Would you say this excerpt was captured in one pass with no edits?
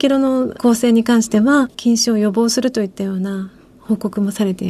no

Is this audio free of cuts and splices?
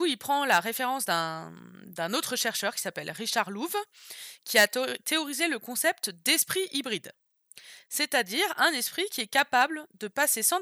yes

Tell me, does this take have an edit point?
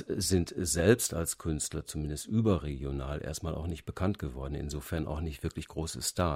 no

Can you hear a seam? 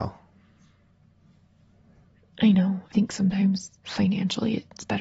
yes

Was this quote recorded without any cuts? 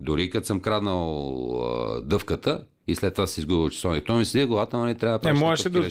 yes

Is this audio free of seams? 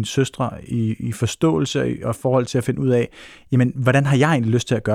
yes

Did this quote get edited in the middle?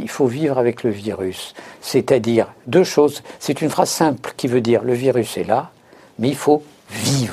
no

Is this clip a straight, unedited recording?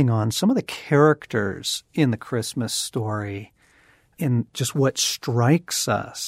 yes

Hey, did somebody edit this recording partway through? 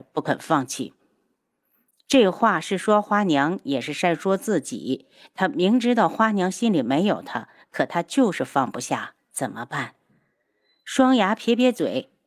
no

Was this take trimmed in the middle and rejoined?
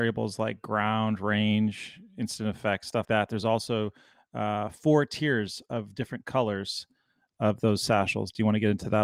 yes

